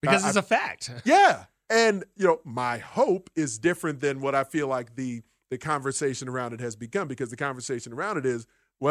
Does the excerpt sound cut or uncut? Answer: uncut